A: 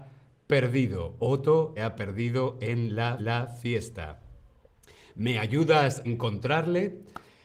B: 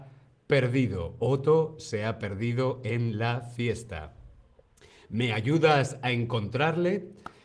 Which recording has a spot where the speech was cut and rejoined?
A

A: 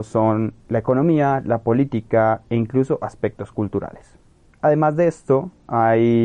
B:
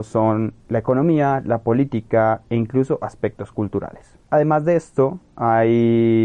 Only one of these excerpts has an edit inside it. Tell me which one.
B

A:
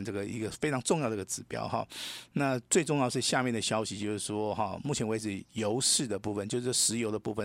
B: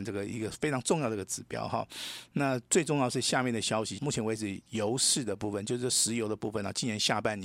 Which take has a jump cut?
B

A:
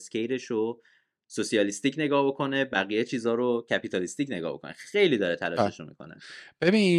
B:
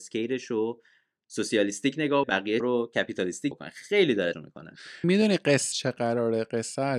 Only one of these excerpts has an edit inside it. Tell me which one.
B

